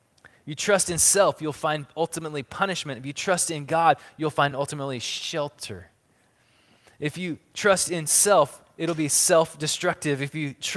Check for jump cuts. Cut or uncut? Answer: uncut